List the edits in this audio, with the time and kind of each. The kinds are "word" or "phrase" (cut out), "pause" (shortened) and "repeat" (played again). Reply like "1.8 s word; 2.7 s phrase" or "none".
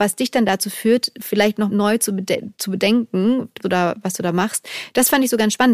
1.7 s word; 3.6 s word